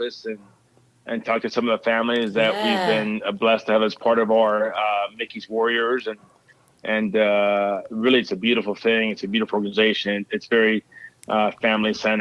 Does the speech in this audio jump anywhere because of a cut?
no; 0 cuts

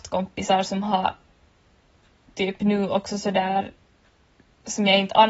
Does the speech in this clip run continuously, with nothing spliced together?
yes; 0 cuts

